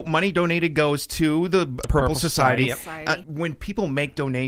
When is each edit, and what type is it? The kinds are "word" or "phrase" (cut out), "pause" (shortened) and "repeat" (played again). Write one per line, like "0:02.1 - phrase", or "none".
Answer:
0:01.8 - word
0:03.2 - word